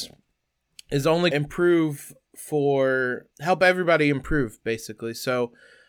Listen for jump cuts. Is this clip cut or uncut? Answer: cut